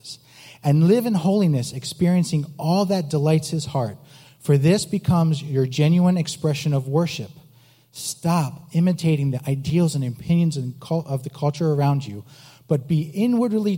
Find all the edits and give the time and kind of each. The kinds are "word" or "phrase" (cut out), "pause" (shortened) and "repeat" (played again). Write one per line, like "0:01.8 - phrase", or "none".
none